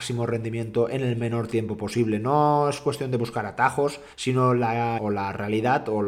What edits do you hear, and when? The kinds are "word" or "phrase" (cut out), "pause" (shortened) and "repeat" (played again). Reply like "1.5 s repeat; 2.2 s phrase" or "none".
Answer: 4.1 s pause; 5.0 s word